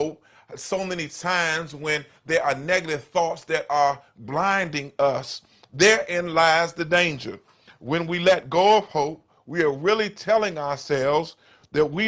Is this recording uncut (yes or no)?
yes